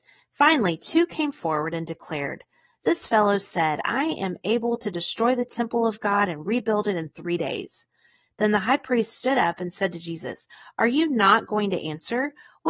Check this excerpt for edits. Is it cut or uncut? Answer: uncut